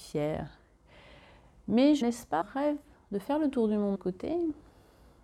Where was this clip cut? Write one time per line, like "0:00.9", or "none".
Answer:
0:02.0
0:02.4
0:04.0